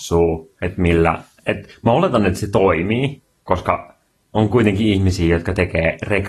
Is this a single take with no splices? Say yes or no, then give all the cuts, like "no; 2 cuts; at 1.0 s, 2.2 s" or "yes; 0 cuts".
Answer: yes; 0 cuts